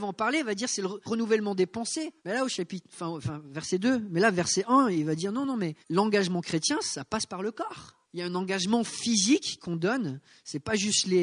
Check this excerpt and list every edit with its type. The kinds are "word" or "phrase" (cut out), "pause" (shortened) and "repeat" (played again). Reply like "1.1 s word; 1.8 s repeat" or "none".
1.1 s phrase; 2.2 s pause; 5.8 s pause; 8.0 s pause